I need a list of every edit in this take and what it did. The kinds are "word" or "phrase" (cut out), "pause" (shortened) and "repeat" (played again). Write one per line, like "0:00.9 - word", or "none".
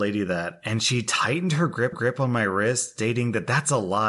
0:01.9 - repeat